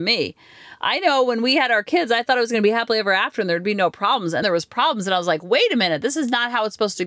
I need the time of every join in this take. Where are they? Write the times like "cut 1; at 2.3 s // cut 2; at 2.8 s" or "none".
cut 1; at 4.4 s